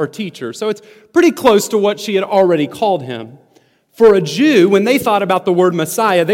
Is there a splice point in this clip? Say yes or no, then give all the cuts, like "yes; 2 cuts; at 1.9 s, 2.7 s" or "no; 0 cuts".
no; 0 cuts